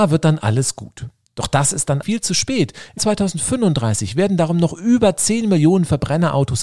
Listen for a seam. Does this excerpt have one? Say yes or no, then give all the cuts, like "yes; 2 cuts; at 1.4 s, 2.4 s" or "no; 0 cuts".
yes; 2 cuts; at 2.0 s, 3.0 s